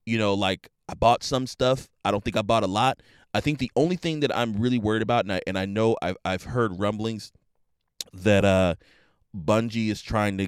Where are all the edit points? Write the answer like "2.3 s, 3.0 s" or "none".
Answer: none